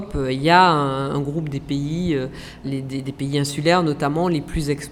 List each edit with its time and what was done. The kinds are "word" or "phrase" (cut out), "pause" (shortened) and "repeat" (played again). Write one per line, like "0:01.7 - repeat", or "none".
0:02.6 - word